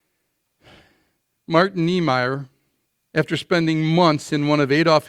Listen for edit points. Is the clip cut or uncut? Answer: cut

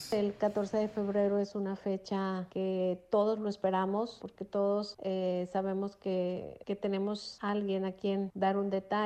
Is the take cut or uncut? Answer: uncut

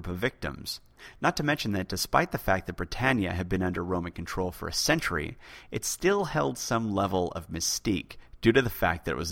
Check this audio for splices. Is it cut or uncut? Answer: uncut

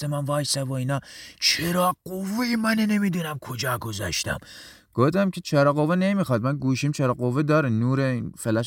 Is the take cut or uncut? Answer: uncut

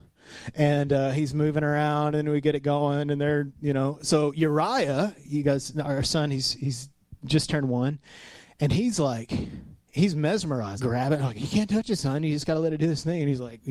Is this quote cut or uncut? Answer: cut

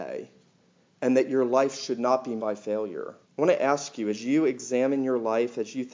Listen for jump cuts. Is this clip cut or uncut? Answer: cut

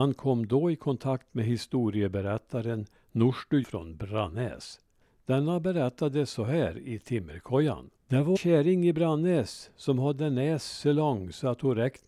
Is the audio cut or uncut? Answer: cut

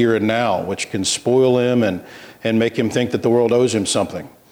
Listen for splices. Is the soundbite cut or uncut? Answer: uncut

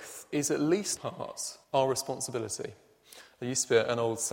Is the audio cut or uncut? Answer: cut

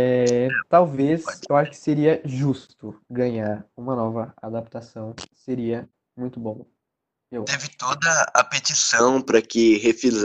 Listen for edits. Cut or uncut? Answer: cut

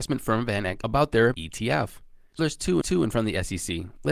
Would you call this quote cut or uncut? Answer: cut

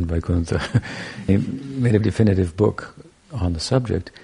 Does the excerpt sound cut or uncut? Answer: cut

